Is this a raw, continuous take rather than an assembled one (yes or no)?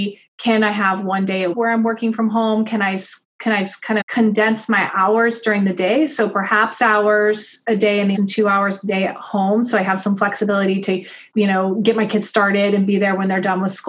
no